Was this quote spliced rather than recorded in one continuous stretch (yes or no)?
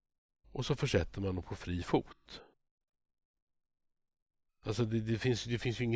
no